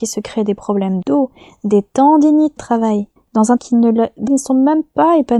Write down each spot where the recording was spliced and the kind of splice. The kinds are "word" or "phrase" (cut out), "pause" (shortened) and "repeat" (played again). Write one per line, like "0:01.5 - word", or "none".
0:01.0 - word
0:02.6 - word
0:03.2 - pause
0:03.6 - word
0:04.3 - word